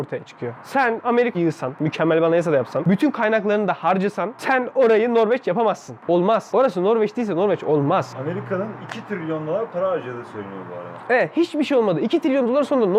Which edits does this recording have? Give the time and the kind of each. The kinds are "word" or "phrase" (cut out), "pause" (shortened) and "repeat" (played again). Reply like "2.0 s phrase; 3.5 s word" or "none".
1.3 s phrase